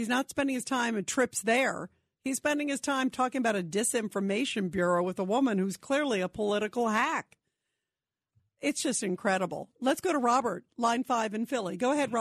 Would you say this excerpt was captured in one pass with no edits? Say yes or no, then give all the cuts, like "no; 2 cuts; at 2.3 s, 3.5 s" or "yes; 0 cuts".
yes; 0 cuts